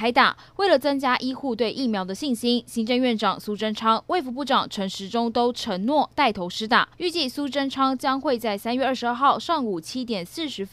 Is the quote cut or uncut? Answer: cut